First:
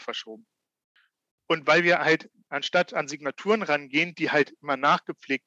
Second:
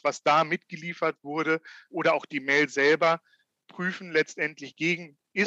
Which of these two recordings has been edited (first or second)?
second